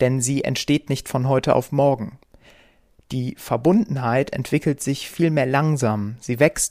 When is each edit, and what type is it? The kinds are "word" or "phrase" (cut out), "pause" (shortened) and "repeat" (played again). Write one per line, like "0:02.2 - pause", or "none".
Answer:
none